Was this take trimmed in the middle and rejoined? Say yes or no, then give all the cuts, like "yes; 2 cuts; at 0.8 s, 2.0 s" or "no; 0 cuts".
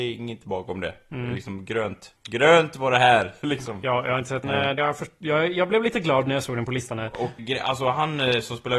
yes; 4 cuts; at 2.2 s, 4.4 s, 4.8 s, 7.4 s